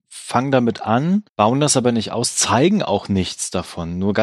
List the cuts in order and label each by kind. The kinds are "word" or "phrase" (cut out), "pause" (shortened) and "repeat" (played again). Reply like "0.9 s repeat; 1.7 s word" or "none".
1.3 s pause